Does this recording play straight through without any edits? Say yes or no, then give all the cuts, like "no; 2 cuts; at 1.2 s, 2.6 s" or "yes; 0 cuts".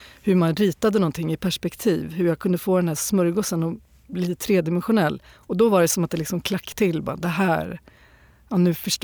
yes; 0 cuts